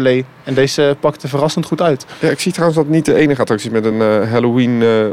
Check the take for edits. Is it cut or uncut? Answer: uncut